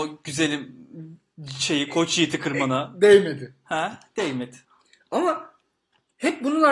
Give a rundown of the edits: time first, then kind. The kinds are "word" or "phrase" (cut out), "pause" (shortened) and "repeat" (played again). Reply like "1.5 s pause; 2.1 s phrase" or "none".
4.6 s pause